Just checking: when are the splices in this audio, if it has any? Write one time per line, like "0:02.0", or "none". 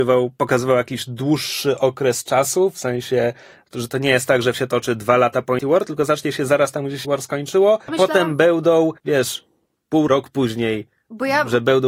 0:04.5
0:05.6
0:07.0
0:07.9
0:09.0
0:10.1